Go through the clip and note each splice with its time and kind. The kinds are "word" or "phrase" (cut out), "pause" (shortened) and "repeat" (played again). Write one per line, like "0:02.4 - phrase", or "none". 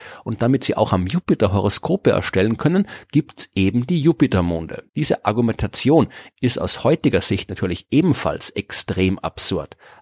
0:04.9 - pause